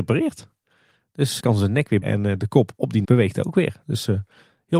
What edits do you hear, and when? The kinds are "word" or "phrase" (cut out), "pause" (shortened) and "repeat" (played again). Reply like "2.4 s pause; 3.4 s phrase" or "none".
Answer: 1.4 s word; 2.0 s word; 3.0 s word

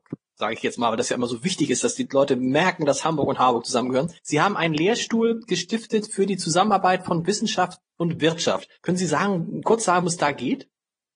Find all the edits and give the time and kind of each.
4.2 s pause; 8.8 s pause; 10.0 s word

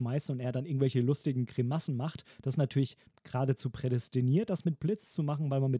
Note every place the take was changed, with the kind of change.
none

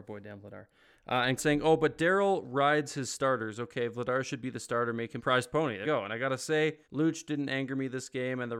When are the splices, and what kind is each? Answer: 1.4 s word; 5.2 s word; 5.8 s word; 6.8 s pause

